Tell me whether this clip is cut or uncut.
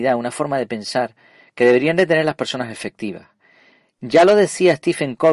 uncut